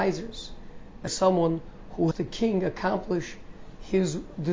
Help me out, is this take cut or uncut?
cut